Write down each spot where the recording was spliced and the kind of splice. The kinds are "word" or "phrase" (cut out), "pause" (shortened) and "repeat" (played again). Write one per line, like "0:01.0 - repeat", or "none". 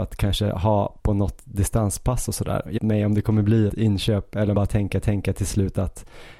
0:01.0 - pause
0:02.8 - phrase
0:03.7 - word
0:04.5 - phrase
0:05.0 - repeat